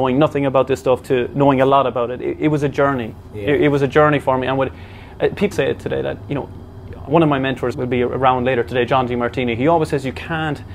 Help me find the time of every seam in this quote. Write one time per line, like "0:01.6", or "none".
0:05.5
0:07.1
0:07.7